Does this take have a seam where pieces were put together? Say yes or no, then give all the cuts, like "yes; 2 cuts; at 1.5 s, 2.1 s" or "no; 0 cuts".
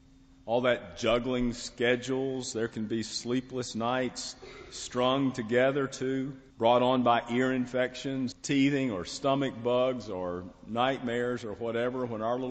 yes; 2 cuts; at 6.5 s, 8.3 s